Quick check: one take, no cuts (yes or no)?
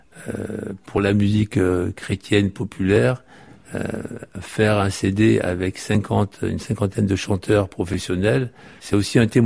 yes